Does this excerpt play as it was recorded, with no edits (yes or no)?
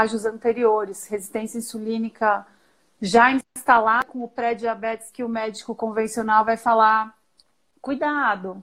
yes